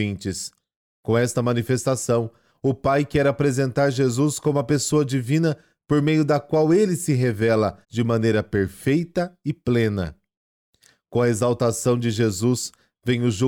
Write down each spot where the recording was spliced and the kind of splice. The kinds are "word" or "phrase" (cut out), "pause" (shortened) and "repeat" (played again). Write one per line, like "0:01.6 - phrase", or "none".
0:07.8 - pause